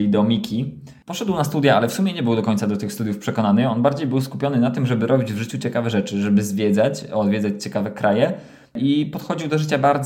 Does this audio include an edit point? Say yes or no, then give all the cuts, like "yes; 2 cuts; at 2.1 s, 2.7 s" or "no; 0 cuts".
no; 0 cuts